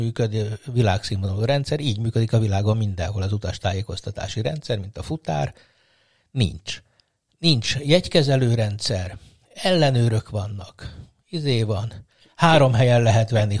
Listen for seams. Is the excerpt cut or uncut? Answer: uncut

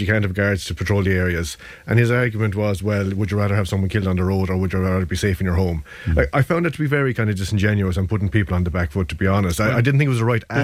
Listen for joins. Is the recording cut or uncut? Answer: uncut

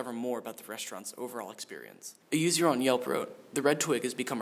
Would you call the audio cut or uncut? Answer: cut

